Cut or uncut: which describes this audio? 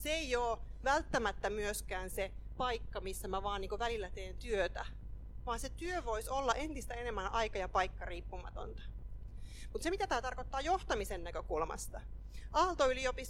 uncut